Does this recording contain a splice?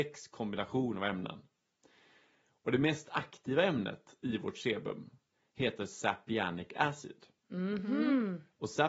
no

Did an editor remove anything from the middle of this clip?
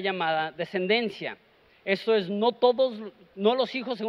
no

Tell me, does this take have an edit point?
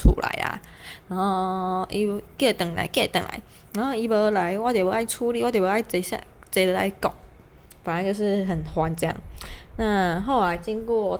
no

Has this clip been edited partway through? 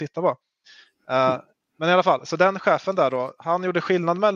no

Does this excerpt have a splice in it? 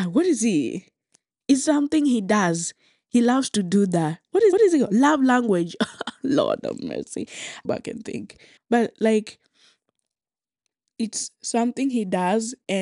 yes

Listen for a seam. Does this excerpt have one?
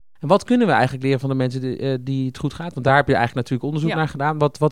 no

